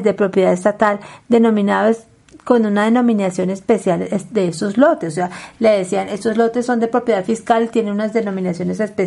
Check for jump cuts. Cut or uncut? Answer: uncut